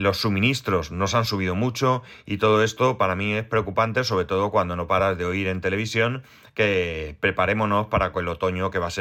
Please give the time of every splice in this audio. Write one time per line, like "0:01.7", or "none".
none